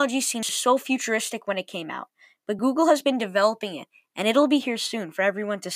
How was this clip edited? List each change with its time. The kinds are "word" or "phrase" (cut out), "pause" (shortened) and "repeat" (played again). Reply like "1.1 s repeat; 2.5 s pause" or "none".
none